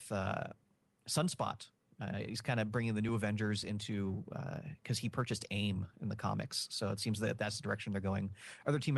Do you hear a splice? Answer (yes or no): no